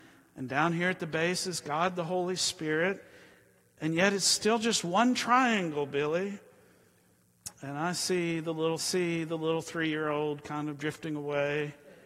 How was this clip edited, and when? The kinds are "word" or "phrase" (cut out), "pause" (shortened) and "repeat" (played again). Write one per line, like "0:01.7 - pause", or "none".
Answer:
0:08.8 - repeat